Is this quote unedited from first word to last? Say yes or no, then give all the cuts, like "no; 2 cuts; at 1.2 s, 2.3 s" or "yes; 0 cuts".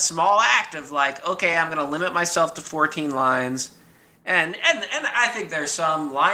yes; 0 cuts